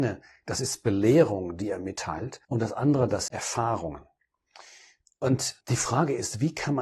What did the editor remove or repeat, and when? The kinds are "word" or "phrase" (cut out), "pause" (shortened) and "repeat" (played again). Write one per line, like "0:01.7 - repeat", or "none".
0:02.4 - pause
0:03.3 - word
0:05.6 - pause